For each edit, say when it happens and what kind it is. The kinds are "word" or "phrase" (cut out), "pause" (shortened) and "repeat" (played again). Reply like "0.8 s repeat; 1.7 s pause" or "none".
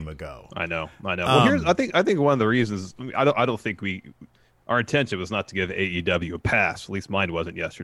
4.3 s pause